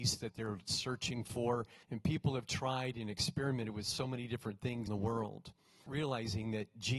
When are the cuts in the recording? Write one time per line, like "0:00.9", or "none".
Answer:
0:01.8
0:04.9
0:05.9